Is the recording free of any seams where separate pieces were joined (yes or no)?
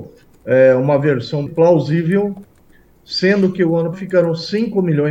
no